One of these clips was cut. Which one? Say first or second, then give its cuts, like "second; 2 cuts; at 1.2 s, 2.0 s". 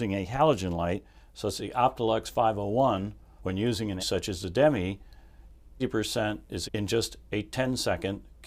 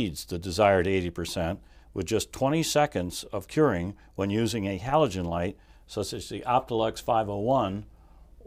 first; 5 cuts; at 1.6 s, 3.4 s, 4.0 s, 5.8 s, 6.6 s